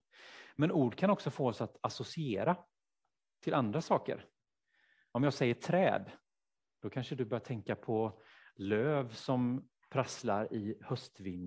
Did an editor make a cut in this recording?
no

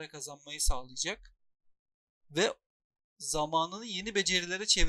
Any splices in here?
no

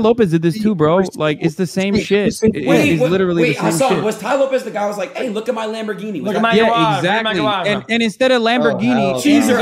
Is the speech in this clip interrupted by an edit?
no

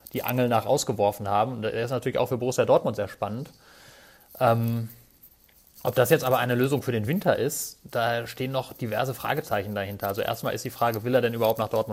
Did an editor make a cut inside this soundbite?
no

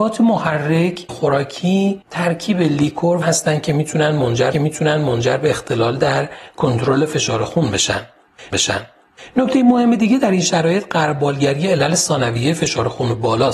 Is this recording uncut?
no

